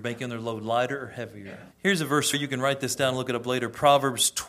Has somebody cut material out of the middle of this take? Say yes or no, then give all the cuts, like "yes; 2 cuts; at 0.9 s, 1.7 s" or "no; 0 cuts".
yes; 2 cuts; at 1.7 s, 2.3 s